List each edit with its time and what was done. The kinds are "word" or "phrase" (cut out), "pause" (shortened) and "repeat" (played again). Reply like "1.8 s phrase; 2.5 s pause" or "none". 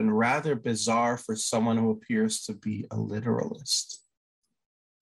none